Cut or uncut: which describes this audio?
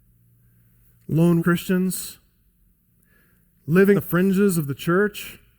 cut